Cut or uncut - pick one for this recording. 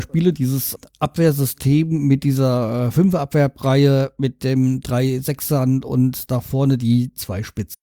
uncut